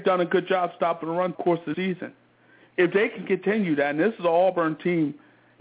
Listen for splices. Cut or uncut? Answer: cut